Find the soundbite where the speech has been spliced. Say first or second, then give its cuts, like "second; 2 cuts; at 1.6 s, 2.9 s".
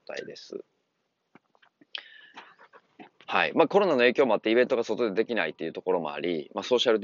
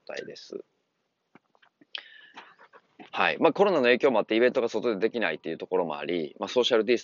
second; 1 cut; at 3.1 s